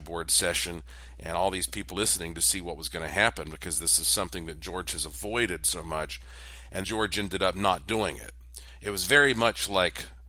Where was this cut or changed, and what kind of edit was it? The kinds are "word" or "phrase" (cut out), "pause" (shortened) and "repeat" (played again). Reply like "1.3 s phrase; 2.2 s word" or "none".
1.9 s word; 6.8 s word